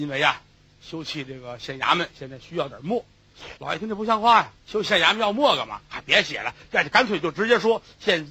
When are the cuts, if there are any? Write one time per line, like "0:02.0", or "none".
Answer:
0:03.6
0:04.6

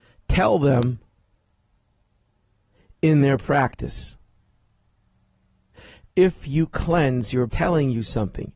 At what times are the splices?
0:07.5

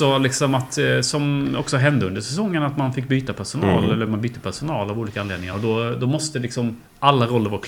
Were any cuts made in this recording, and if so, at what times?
none

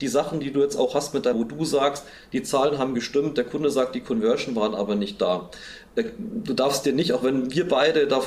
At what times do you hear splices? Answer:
0:01.3

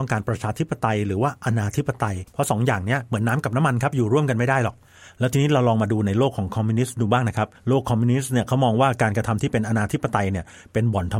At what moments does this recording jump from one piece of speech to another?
0:02.3
0:07.6

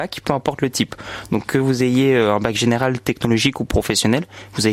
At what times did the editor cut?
none

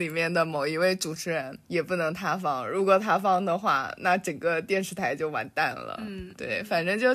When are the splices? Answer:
0:01.6

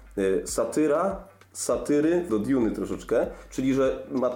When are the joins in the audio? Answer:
0:02.3

